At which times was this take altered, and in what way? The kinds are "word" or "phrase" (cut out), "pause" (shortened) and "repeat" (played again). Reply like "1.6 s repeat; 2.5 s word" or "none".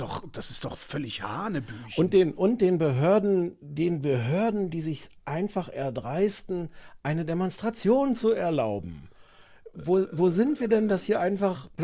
none